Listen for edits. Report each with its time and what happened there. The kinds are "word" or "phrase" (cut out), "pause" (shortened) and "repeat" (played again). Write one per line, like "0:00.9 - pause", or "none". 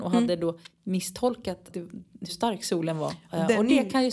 0:01.7 - word
0:02.3 - word